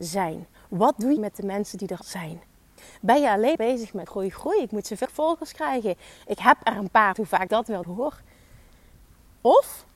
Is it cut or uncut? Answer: cut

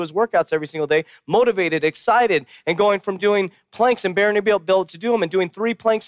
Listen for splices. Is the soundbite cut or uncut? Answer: uncut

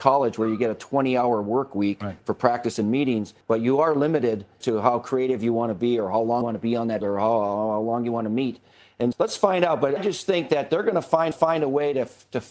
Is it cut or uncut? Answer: cut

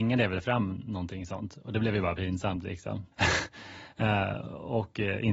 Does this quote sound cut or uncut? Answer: cut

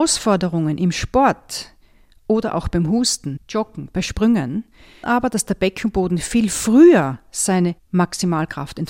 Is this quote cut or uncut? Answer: cut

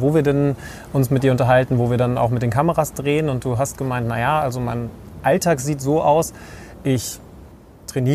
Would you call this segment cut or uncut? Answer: uncut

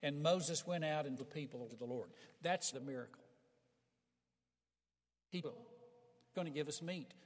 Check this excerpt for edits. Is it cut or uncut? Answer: cut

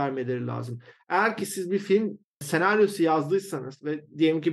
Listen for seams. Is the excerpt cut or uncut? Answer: uncut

